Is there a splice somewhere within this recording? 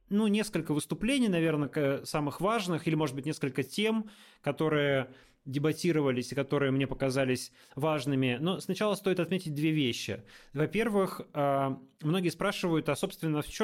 no; 0 cuts

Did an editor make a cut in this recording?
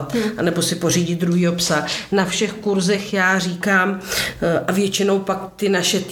no; 0 cuts

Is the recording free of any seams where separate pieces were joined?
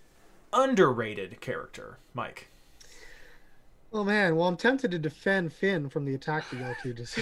yes; 0 cuts

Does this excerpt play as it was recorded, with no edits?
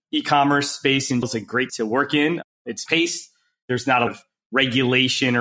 no; 4 cuts; at 1.2 s, 1.7 s, 2.9 s, 4.1 s

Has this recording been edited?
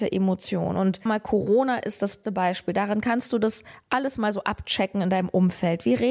yes; 2 cuts; at 1.1 s, 2.2 s

